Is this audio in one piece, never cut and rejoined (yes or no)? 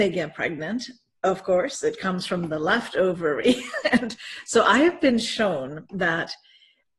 yes